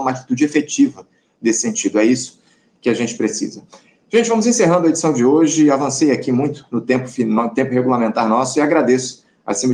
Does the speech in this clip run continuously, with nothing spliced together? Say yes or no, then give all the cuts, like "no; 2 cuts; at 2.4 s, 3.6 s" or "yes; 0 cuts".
yes; 0 cuts